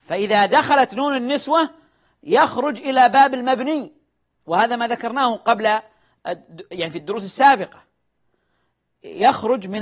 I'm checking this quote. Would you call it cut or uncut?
uncut